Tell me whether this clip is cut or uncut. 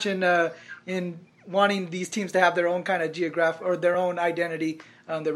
uncut